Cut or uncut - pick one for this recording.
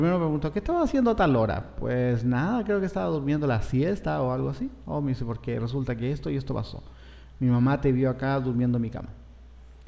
uncut